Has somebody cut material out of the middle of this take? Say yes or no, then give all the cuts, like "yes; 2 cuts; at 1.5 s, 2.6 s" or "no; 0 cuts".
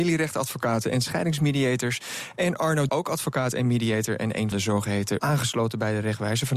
yes; 3 cuts; at 2.9 s, 4.5 s, 5.2 s